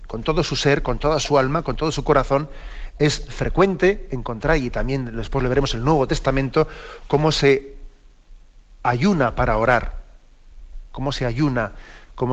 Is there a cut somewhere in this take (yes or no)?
no